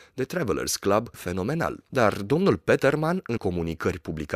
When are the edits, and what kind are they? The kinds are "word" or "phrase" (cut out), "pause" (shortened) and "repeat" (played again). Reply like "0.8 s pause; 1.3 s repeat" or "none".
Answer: 1.1 s phrase; 3.4 s word